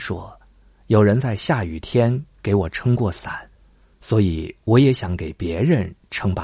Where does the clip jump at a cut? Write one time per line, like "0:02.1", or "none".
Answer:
none